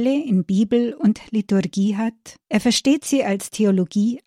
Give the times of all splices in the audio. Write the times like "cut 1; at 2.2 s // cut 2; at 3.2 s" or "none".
cut 1; at 2.4 s